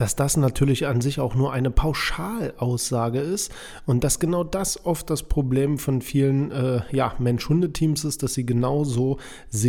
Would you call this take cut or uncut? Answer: uncut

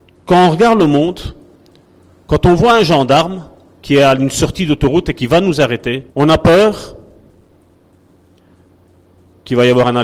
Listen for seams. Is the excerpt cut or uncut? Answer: cut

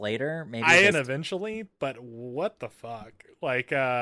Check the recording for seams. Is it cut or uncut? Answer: cut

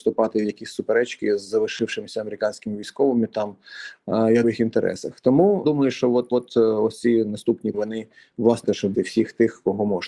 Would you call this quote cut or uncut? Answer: cut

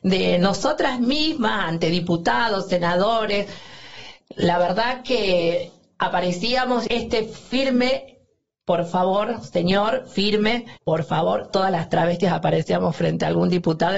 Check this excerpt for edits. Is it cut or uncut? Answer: cut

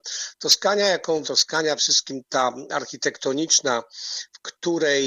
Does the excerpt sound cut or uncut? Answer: cut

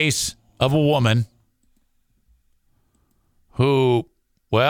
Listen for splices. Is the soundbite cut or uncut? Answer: uncut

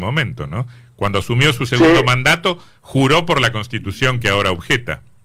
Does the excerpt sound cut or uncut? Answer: uncut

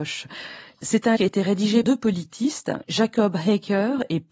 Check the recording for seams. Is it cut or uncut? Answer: cut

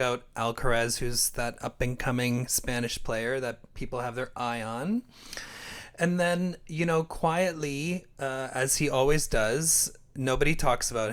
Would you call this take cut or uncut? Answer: uncut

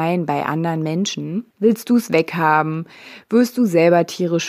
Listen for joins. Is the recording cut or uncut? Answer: cut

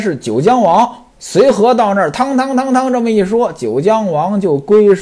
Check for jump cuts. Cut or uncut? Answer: cut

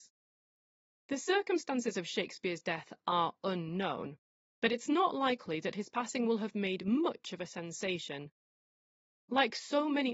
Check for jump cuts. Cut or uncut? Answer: uncut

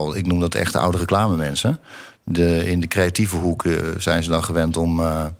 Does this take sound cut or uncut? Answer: uncut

